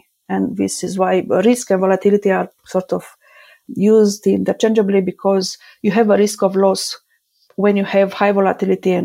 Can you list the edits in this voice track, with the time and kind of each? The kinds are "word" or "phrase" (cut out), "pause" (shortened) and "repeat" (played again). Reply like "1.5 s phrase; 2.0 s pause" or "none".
none

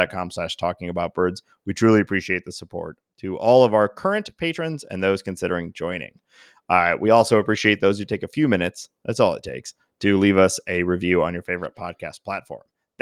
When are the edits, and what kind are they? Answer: none

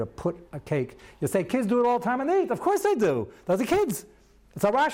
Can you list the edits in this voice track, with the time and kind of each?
none

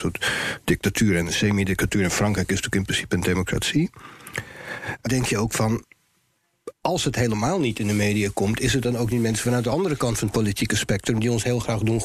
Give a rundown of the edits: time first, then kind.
5.1 s phrase

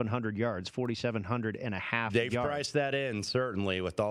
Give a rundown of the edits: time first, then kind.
none

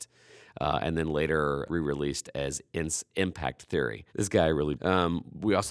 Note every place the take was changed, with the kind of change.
1.7 s word; 4.1 s pause; 4.8 s phrase

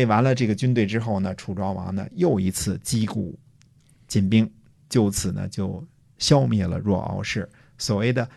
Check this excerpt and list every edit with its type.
none

